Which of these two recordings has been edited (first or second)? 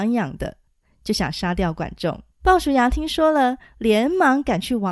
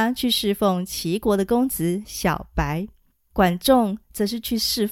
first